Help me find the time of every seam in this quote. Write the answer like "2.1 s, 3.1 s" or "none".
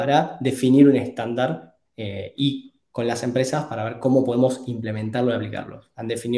none